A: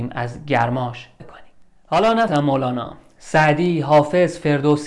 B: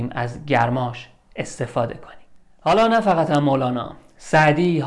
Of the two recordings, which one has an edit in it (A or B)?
A